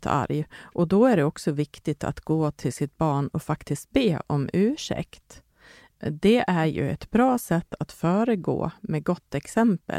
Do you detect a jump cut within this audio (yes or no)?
no